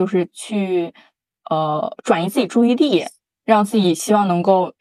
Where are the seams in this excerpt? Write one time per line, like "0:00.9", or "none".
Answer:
none